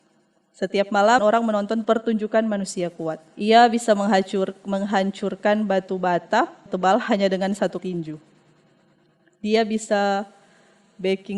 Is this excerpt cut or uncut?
cut